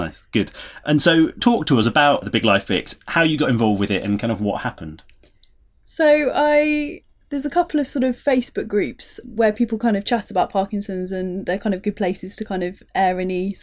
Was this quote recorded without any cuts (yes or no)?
yes